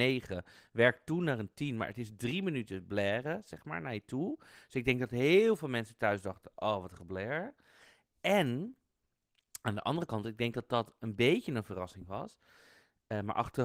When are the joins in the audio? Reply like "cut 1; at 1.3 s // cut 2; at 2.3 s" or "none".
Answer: none